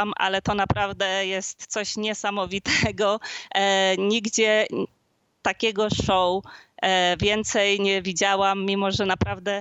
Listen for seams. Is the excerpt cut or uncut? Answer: uncut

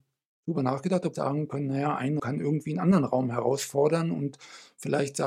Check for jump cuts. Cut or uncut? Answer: cut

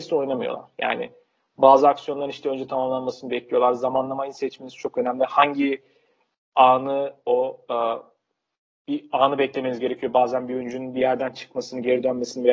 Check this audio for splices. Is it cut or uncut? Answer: uncut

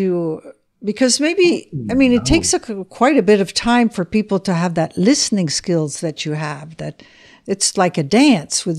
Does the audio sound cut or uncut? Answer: uncut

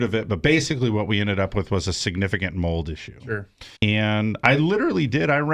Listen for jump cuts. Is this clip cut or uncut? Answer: cut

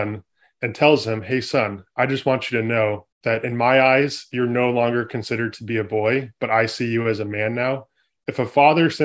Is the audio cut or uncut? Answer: cut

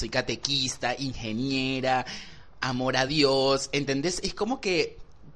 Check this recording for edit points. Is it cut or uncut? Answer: uncut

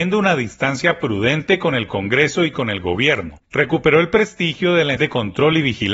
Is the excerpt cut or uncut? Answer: cut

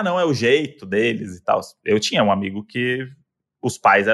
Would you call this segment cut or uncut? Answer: uncut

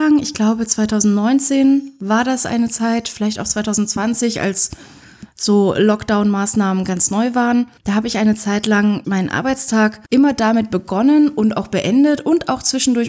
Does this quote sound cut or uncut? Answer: cut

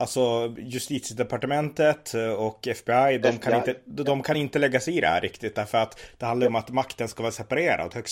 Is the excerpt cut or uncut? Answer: uncut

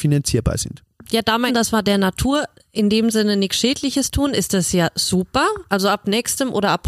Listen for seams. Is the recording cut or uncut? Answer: cut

